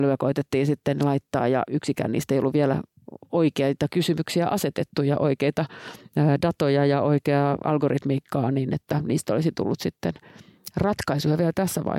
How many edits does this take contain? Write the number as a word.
zero